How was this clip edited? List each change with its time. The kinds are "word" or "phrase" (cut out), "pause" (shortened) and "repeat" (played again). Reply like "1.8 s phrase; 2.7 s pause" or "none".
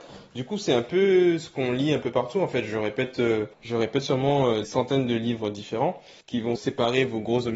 3.5 s pause; 4.6 s word; 6.2 s pause; 6.6 s phrase